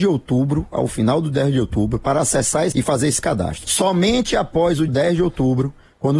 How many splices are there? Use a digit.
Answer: 2